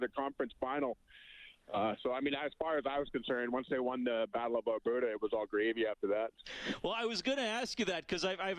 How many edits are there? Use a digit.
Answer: 0